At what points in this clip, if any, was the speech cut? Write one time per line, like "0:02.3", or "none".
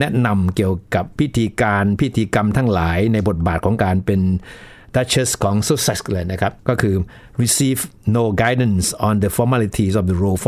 none